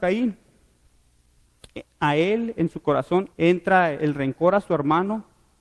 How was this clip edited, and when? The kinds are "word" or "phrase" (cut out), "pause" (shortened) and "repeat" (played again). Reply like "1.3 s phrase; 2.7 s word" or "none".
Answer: 3.3 s pause